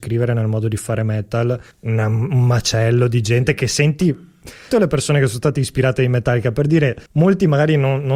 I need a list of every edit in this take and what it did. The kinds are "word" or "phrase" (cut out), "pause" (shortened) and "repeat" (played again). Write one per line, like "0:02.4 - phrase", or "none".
0:01.7 - pause
0:04.7 - phrase
0:07.1 - pause

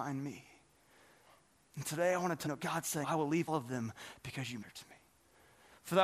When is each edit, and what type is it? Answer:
0:02.5 - word
0:03.0 - word
0:03.5 - word
0:04.6 - word

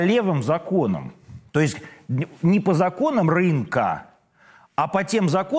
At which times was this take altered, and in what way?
0:01.5 - pause

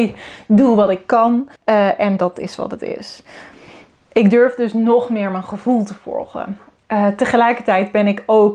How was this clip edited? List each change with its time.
0:01.6 - pause

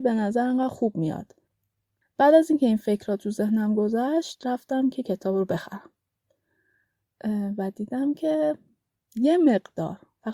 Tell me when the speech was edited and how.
none

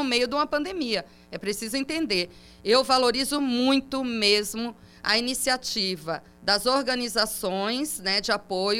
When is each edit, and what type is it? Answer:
none

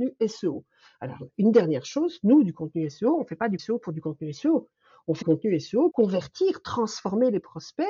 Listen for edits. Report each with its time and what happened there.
0:03.6 - word
0:05.2 - word
0:05.9 - word

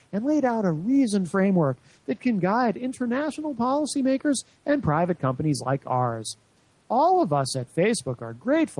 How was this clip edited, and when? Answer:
none

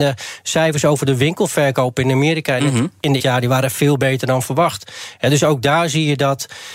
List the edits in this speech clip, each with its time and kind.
0:03.2 - phrase

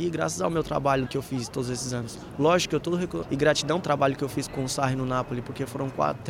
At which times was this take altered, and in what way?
0:01.1 - word
0:01.5 - word
0:02.8 - word
0:03.2 - word
0:03.8 - word
0:04.5 - word

